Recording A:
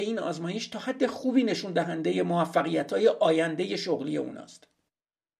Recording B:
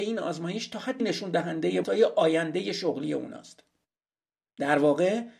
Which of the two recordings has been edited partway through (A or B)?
B